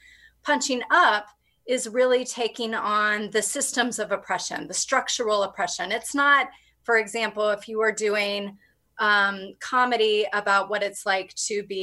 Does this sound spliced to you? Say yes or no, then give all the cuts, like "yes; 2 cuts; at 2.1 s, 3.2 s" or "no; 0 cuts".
no; 0 cuts